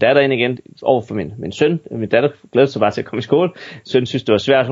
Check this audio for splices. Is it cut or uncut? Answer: uncut